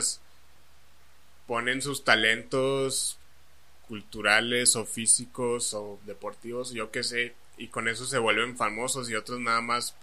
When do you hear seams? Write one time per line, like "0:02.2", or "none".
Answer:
none